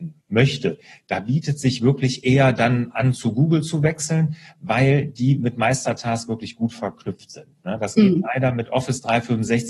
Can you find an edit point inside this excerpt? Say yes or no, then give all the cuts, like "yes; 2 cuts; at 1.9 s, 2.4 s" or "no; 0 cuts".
no; 0 cuts